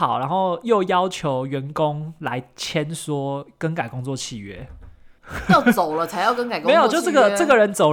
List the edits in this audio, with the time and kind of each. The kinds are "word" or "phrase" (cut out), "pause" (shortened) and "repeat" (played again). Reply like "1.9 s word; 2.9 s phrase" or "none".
5.2 s pause